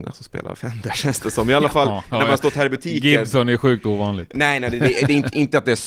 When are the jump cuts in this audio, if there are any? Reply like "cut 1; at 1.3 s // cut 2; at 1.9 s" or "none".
none